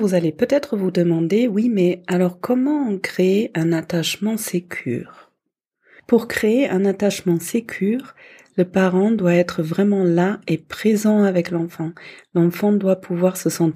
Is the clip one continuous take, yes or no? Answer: yes